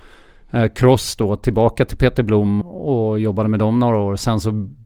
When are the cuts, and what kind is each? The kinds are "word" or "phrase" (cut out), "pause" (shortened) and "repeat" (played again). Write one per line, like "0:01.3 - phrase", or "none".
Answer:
0:02.6 - word